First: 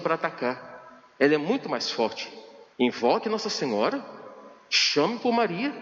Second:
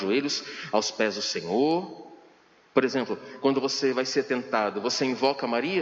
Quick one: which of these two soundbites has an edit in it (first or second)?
first